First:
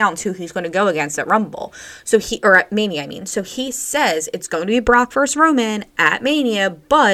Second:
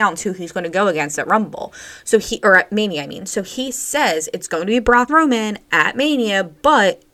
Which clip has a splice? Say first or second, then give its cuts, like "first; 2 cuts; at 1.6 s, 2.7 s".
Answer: second; 1 cut; at 5.1 s